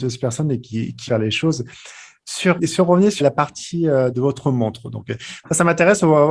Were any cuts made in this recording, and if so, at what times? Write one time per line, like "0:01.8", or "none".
0:01.1
0:02.6
0:03.2
0:04.1